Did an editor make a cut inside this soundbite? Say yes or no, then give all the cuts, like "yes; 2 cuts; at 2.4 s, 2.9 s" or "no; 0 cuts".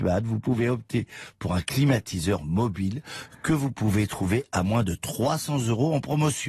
no; 0 cuts